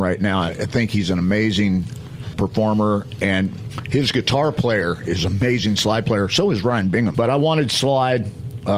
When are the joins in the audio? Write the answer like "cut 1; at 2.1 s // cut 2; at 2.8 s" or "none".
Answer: cut 1; at 2.3 s // cut 2; at 7.1 s

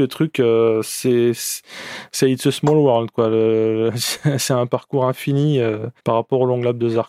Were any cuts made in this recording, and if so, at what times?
cut 1; at 6.0 s

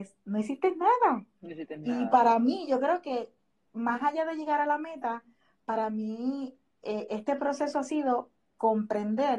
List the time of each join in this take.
none

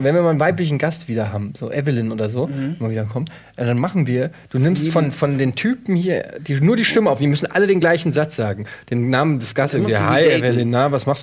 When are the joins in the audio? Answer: none

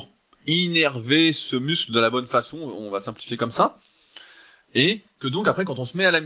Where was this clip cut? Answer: none

